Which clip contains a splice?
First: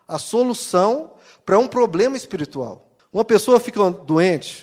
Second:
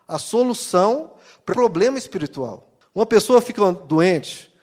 second; 1 cut; at 1.5 s

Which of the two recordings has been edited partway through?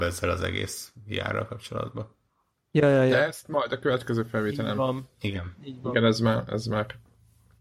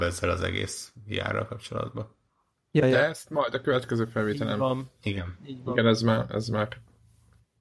second; 1 cut; at 2.8 s

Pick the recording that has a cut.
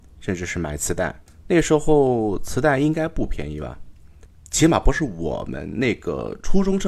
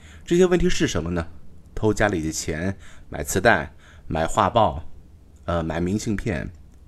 first; 1 cut; at 1.3 s

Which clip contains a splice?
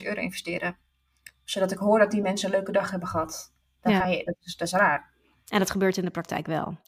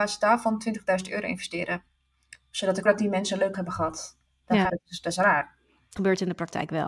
second; 4 cuts; at 2.9 s, 3.5 s, 4.7 s, 6.0 s

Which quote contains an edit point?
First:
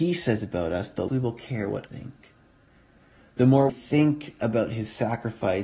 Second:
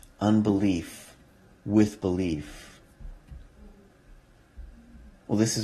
first; 3 cuts; at 1.1 s, 1.9 s, 3.7 s

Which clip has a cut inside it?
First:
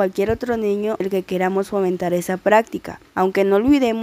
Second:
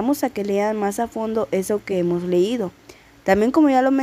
first; 2 cuts; at 1.0 s, 3.1 s

